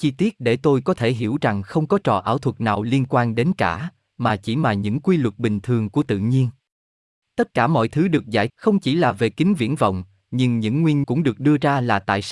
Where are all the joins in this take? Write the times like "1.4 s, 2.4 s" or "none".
8.5 s, 11.0 s

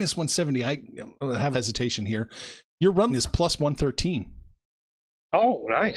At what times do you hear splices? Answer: 1.5 s, 3.1 s

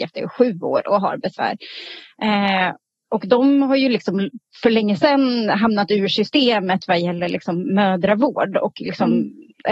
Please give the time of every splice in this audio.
none

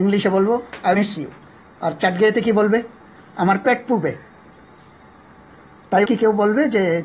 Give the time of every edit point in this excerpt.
0.9 s, 6.1 s

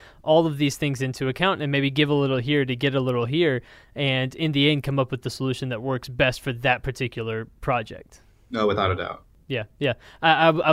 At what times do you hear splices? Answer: none

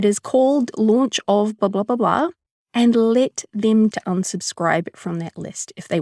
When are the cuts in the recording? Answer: 1.6 s, 2.5 s, 3.9 s

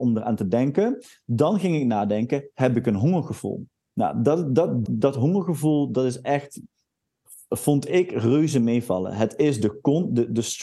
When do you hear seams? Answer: 3.9 s, 4.9 s

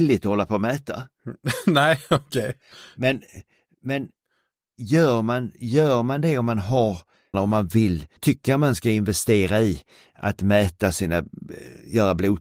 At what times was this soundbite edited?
7.3 s, 8.2 s

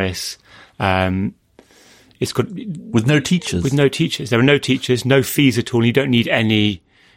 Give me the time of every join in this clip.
none

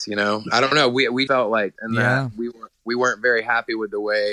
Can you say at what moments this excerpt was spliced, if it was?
1.3 s, 1.8 s

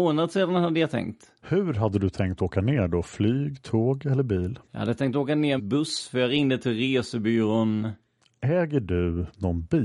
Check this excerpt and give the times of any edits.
1.4 s, 4.6 s, 5.6 s

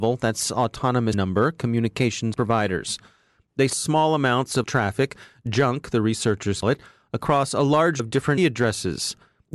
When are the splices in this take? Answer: 1.1 s, 2.3 s, 3.7 s, 4.6 s, 6.6 s, 8.0 s, 8.4 s

